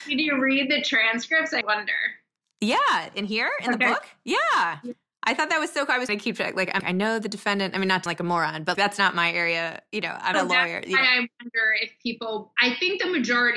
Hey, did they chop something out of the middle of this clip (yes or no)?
yes